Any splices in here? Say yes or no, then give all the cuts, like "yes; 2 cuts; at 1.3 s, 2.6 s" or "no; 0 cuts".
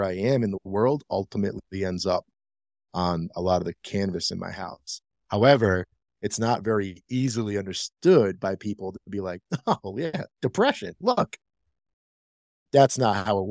no; 0 cuts